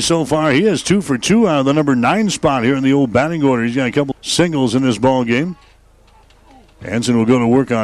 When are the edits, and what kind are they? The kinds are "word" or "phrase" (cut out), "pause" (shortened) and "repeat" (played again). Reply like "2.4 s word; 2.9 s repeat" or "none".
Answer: 4.1 s word